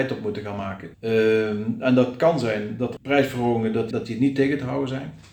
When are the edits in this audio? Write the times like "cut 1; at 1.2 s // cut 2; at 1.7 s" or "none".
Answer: cut 1; at 0.9 s // cut 2; at 3.0 s // cut 3; at 3.9 s